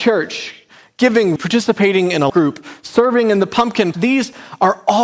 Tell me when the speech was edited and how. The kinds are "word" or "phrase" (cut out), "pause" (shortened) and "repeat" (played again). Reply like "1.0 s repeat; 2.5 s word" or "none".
1.4 s word; 2.3 s word; 3.9 s word